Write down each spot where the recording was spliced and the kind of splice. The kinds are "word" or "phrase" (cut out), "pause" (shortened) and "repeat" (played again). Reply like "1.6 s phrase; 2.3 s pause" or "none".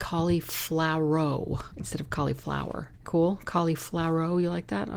3.0 s word